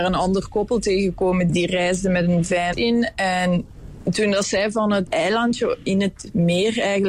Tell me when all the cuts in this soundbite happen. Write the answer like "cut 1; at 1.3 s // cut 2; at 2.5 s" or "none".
cut 1; at 1.5 s // cut 2; at 2.7 s // cut 3; at 5.1 s

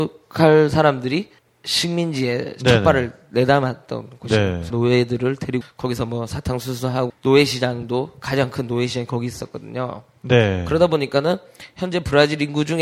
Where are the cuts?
cut 1; at 1.4 s // cut 2; at 4.7 s // cut 3; at 5.6 s // cut 4; at 7.1 s

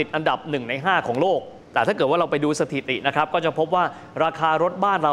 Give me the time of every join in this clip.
cut 1; at 1.6 s

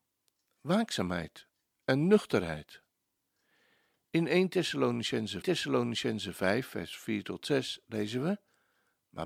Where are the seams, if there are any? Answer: cut 1; at 5.4 s

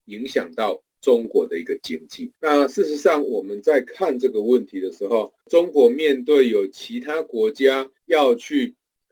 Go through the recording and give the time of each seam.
cut 1; at 2.3 s // cut 2; at 5.4 s // cut 3; at 8.0 s

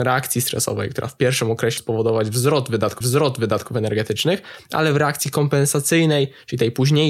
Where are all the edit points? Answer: cut 1; at 1.8 s // cut 2; at 3.0 s

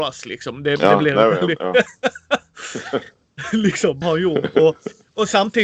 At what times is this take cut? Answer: cut 1; at 4.0 s

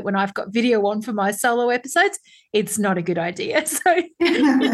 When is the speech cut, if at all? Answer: none

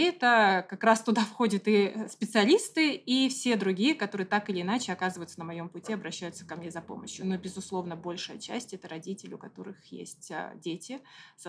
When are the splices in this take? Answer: none

